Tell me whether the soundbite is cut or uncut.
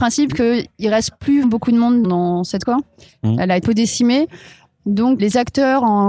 cut